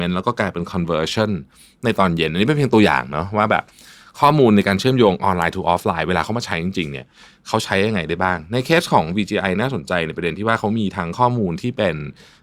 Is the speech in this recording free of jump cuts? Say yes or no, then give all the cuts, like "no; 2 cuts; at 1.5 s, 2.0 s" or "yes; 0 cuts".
yes; 0 cuts